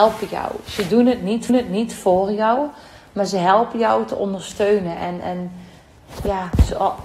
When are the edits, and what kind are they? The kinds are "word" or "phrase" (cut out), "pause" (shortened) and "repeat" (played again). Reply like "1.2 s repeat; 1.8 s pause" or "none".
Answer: 1.5 s repeat